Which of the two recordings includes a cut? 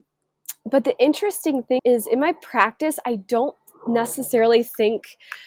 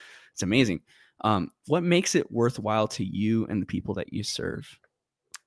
first; 1 cut; at 1.8 s

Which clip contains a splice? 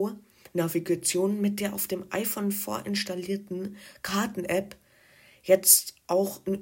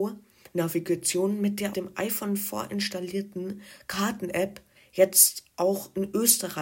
second; 2 cuts; at 1.7 s, 4.8 s

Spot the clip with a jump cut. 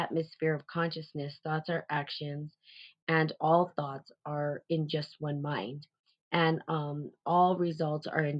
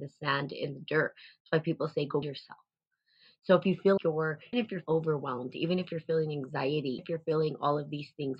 second; 5 cuts; at 2.2 s, 4.0 s, 4.5 s, 4.9 s, 7.0 s

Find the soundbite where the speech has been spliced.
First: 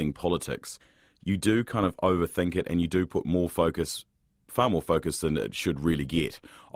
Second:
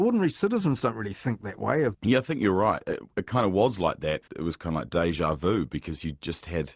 second; 1 cut; at 4.3 s

